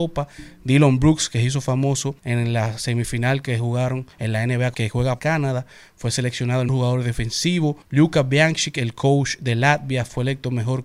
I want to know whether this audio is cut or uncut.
cut